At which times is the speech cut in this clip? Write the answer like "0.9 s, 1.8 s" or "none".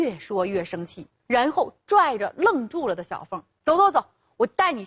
1.1 s